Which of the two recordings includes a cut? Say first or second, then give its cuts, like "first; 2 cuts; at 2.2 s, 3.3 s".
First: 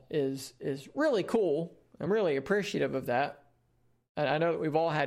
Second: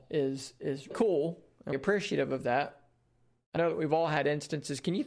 second; 3 cuts; at 0.9 s, 1.7 s, 3.6 s